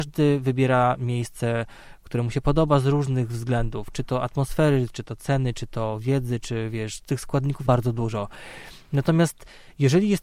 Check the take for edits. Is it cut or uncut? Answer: cut